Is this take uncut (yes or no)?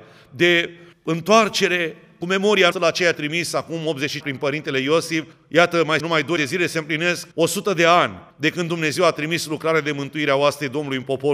no